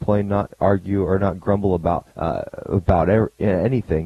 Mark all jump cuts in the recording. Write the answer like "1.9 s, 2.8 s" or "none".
2.1 s